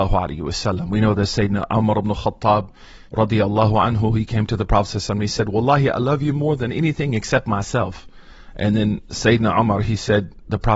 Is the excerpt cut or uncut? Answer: cut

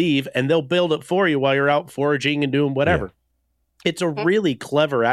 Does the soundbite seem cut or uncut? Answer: uncut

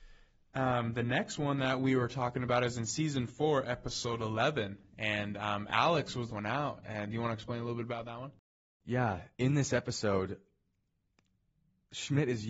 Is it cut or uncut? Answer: cut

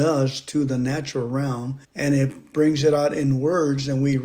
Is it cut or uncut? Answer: cut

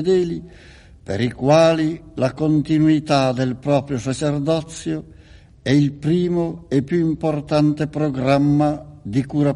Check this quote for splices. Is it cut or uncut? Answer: uncut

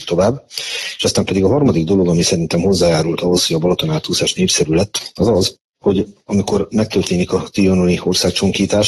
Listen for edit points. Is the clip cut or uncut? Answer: uncut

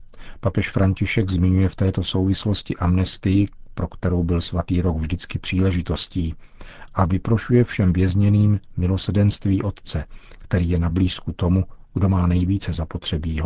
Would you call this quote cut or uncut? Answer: uncut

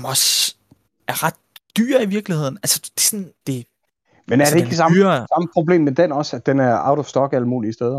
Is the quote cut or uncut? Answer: cut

